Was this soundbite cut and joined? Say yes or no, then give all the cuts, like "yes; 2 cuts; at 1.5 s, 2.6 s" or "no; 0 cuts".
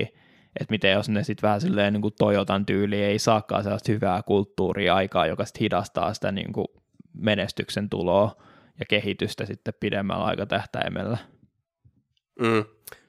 no; 0 cuts